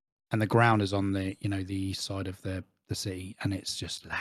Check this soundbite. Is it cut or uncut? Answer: uncut